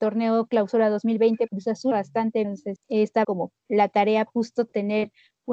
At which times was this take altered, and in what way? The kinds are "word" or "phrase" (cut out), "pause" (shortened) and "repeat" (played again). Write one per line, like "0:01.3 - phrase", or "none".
0:01.5 - word
0:01.9 - word
0:02.4 - word
0:02.8 - word
0:03.2 - word
0:04.3 - word